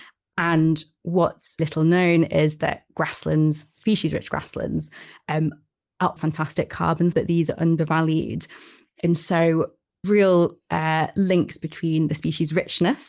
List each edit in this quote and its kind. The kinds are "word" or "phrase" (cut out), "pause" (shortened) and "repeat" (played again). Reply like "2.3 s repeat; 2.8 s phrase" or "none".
1.6 s word; 6.2 s word; 7.1 s word; 10.0 s word

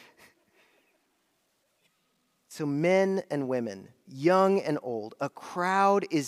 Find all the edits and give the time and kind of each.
none

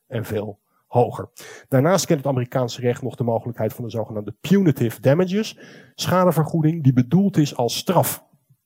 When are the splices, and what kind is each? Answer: none

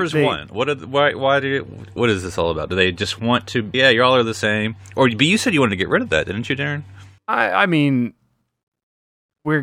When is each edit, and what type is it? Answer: 2.0 s word; 3.7 s phrase; 7.2 s pause

